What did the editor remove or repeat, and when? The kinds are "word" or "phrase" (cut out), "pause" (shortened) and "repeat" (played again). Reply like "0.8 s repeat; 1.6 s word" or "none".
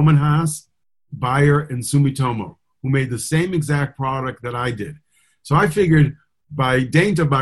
none